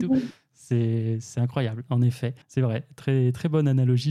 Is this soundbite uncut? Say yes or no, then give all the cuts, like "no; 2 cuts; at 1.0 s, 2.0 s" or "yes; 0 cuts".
no; 1 cut; at 2.4 s